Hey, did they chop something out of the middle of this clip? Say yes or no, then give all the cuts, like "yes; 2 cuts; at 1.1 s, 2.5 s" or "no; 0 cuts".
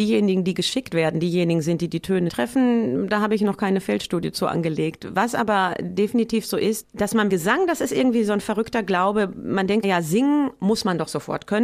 yes; 4 cuts; at 2.3 s, 6.8 s, 7.3 s, 9.8 s